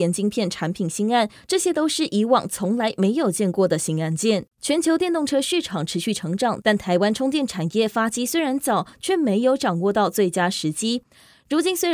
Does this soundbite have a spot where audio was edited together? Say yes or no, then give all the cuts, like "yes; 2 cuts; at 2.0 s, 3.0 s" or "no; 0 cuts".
yes; 1 cut; at 4.5 s